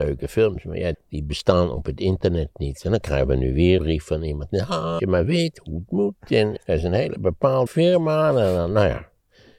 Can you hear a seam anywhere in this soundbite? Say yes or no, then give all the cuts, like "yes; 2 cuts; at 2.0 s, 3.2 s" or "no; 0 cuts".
yes; 5 cuts; at 0.9 s, 3.8 s, 5.0 s, 6.6 s, 7.7 s